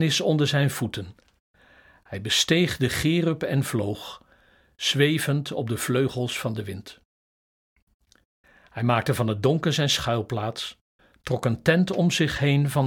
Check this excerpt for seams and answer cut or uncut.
uncut